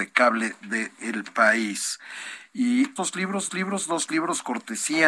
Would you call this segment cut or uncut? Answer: cut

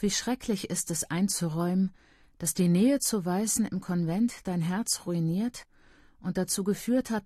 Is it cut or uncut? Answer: uncut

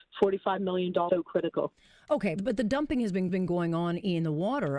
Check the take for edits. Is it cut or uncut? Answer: cut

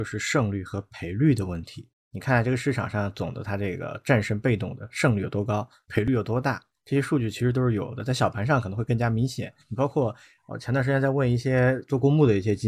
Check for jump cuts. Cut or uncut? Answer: uncut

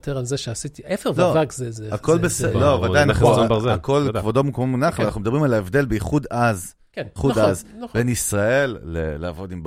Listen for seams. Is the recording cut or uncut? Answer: uncut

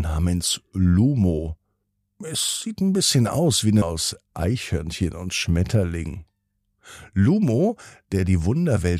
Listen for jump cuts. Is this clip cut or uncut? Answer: cut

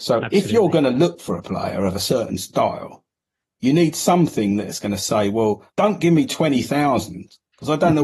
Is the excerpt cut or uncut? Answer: cut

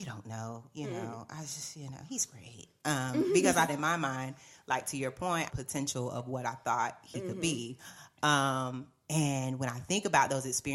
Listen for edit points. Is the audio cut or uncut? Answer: cut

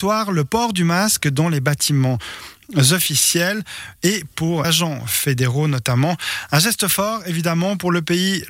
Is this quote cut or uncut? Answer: cut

